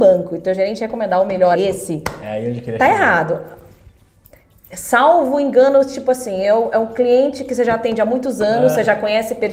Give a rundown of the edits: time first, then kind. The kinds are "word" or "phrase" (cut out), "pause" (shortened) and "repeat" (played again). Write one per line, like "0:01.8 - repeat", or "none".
0:01.6 - word